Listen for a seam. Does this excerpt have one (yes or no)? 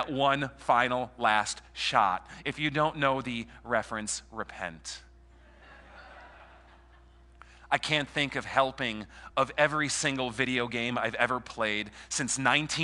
no